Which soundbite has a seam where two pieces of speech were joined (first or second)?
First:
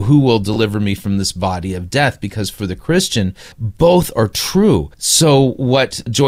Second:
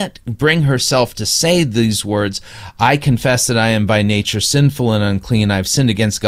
first